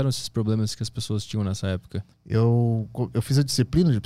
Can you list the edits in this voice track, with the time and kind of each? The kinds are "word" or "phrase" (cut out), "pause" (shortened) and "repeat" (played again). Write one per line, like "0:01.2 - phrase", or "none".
0:02.1 - pause